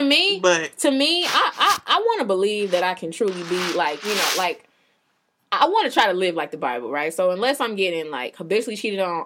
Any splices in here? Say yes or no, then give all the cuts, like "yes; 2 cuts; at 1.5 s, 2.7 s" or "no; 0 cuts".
no; 0 cuts